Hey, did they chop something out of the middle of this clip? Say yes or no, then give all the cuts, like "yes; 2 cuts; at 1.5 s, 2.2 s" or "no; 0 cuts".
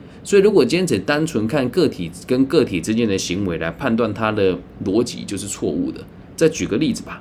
no; 0 cuts